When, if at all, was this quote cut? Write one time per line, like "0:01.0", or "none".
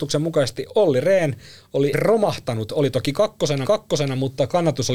0:01.9
0:03.6